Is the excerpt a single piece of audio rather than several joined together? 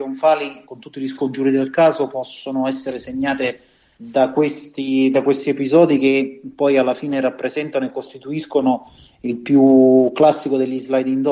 yes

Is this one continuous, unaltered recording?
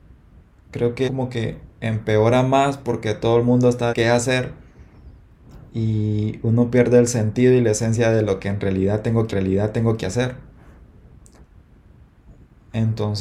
no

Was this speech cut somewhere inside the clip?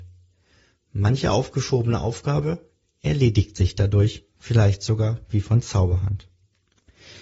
no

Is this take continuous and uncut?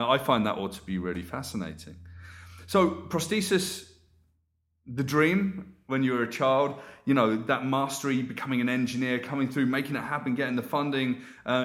yes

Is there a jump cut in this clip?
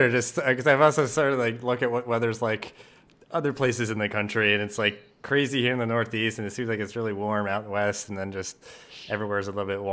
no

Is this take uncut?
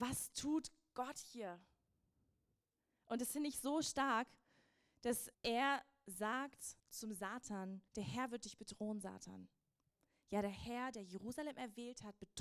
no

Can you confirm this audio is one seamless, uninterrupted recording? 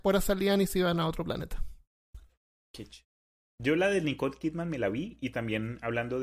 yes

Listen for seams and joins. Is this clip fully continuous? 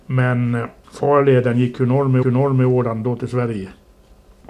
no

